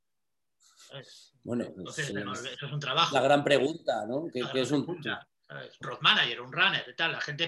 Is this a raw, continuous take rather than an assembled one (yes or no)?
no